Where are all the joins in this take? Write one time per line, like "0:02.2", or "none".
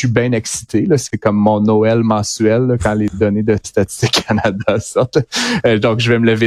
none